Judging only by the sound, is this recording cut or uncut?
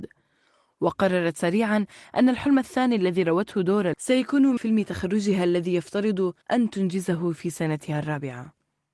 cut